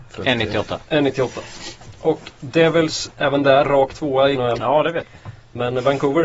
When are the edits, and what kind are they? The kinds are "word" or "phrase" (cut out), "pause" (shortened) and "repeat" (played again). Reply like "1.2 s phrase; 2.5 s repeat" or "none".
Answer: 3.1 s word; 3.6 s word; 4.3 s phrase